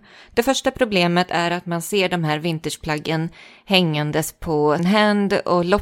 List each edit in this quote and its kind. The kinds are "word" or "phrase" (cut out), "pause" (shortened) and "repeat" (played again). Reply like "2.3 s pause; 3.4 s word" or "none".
4.8 s word